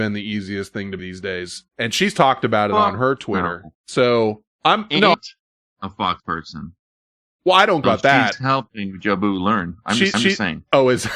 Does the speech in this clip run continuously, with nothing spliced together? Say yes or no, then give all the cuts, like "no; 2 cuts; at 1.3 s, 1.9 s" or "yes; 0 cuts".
no; 7 cuts; at 1.0 s, 1.7 s, 4.5 s, 5.1 s, 6.2 s, 7.8 s, 10.1 s